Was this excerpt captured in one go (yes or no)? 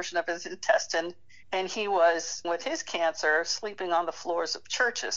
no